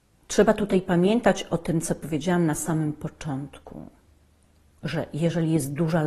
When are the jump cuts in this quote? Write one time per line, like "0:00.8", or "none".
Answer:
none